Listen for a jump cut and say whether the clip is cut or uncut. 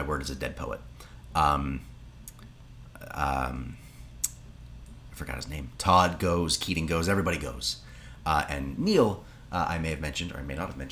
uncut